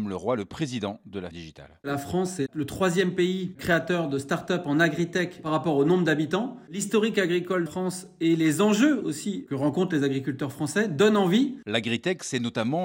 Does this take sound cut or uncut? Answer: cut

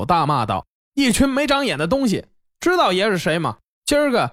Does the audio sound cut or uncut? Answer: uncut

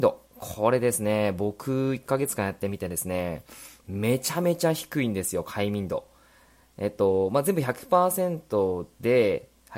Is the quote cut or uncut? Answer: uncut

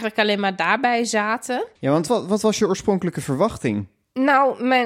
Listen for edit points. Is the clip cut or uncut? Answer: cut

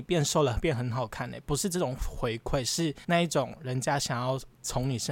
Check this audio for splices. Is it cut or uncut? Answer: cut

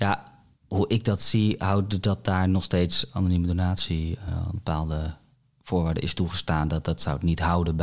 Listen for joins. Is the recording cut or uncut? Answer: uncut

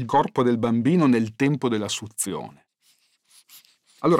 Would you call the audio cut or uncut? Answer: uncut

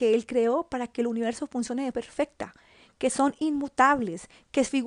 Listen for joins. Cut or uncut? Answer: cut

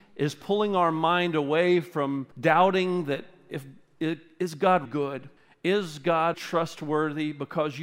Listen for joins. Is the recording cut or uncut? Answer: cut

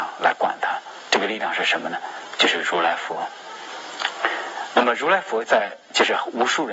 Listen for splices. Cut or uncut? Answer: cut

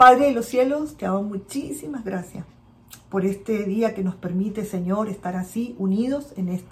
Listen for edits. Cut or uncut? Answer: uncut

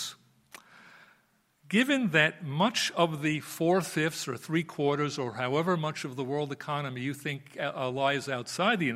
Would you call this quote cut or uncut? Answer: uncut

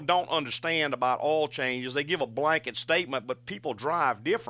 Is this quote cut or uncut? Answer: uncut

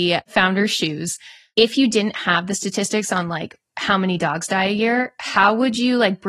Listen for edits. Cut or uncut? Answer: uncut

